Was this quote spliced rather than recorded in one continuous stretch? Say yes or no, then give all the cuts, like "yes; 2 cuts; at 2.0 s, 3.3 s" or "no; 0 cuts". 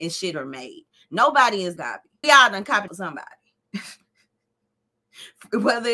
yes; 3 cuts; at 1.8 s, 2.2 s, 2.9 s